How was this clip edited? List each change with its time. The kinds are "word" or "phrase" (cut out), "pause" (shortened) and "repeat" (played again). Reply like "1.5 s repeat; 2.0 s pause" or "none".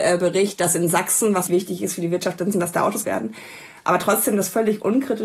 1.5 s word; 2.5 s word; 3.0 s word